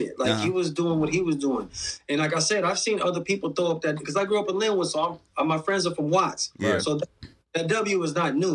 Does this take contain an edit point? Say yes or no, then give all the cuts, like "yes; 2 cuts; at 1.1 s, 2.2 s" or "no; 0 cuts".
no; 0 cuts